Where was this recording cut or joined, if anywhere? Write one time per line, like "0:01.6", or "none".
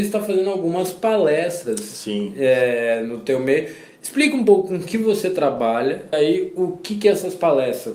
0:06.1